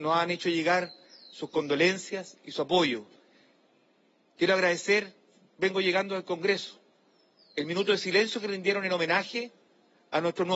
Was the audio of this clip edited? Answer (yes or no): no